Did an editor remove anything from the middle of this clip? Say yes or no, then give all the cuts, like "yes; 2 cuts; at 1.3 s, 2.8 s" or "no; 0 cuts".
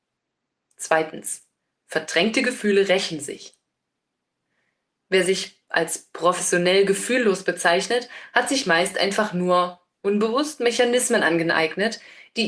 no; 0 cuts